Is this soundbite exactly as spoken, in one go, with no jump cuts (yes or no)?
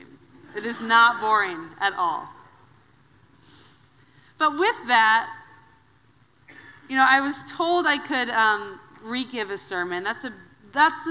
yes